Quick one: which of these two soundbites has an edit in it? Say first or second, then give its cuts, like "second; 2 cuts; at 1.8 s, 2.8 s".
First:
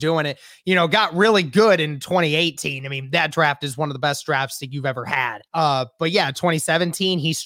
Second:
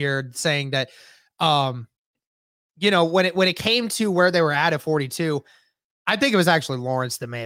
first; 1 cut; at 5.5 s